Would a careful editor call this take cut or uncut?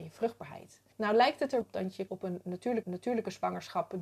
cut